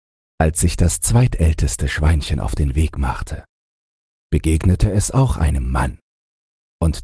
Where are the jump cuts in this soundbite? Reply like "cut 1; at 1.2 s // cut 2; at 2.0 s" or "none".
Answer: none